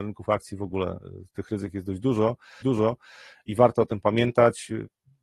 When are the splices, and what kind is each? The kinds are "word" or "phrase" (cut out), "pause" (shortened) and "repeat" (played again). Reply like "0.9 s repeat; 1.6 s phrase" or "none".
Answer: 2.6 s repeat